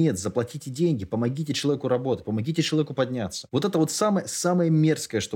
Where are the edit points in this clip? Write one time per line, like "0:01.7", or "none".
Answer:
none